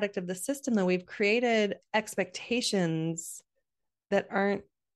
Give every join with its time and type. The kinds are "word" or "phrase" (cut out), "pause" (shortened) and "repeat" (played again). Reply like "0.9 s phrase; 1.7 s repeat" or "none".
1.8 s word